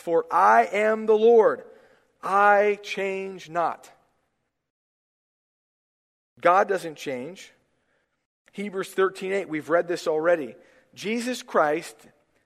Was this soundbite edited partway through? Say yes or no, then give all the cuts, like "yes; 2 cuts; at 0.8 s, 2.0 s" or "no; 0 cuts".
no; 0 cuts